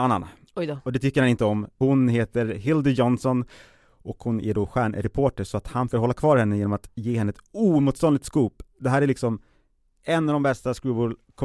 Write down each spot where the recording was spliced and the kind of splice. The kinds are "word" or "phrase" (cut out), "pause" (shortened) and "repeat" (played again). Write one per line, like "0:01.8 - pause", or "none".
0:05.9 - word